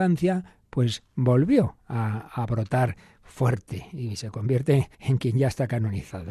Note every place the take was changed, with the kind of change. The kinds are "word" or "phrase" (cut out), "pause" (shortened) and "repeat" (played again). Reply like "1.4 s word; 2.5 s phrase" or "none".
4.9 s pause

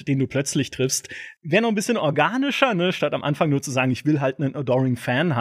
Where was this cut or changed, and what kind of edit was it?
1.4 s pause

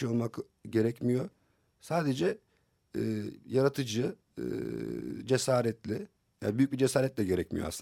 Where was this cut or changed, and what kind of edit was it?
none

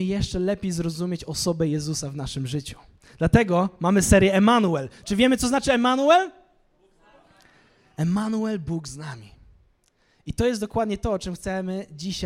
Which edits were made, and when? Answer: none

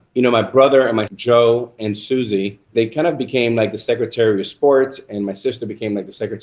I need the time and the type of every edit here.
1.1 s word; 2.6 s pause

